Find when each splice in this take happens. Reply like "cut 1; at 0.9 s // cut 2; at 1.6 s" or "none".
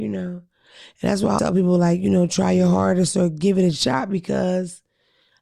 cut 1; at 1.4 s